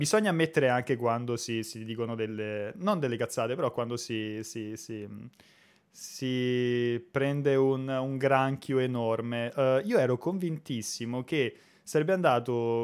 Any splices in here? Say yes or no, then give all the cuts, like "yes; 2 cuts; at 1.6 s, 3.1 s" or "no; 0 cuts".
no; 0 cuts